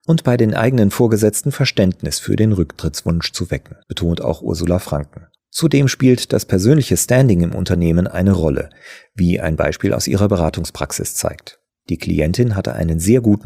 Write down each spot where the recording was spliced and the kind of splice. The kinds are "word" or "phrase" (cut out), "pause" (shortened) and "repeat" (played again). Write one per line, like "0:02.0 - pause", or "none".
0:03.8 - pause
0:05.4 - pause
0:11.7 - pause